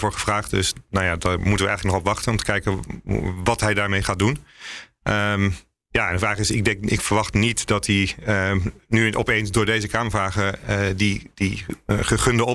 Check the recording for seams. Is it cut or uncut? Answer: uncut